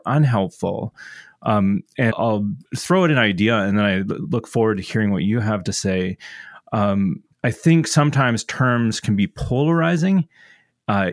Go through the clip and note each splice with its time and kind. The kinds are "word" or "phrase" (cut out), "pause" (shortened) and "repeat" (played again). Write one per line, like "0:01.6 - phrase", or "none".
0:02.1 - word
0:02.7 - pause
0:07.3 - pause